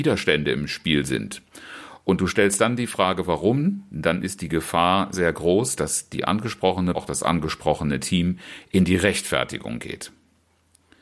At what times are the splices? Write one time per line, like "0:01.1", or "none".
0:05.1
0:06.9